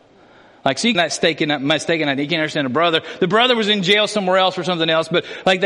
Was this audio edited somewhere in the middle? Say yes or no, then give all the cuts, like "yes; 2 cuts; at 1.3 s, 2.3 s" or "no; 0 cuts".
yes; 1 cut; at 0.9 s